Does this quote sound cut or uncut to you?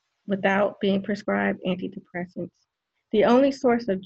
cut